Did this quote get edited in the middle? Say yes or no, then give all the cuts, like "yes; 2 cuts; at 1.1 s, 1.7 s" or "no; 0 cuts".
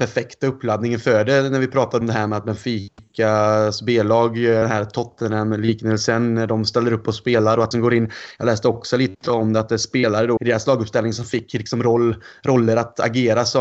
yes; 3 cuts; at 2.0 s, 7.7 s, 10.4 s